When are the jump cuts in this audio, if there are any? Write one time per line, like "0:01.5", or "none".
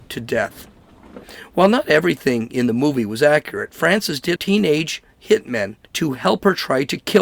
0:04.4
0:05.8